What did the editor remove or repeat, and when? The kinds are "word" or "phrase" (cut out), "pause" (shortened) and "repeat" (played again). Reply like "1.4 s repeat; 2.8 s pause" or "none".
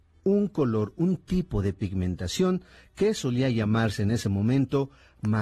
none